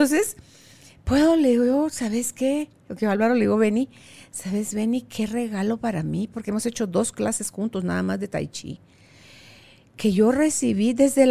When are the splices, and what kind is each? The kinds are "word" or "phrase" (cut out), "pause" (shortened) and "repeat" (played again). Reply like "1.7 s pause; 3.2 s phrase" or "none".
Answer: none

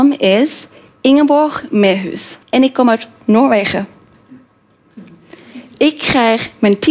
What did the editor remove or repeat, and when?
2.4 s pause

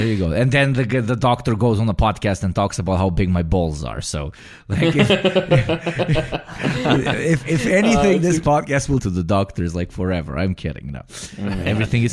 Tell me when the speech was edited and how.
9.0 s phrase

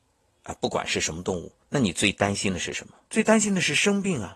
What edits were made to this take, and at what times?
1.6 s pause; 3.0 s pause

